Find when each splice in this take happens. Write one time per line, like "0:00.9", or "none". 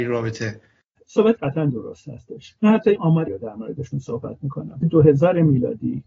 0:01.4
0:03.0
0:03.3
0:03.9
0:04.8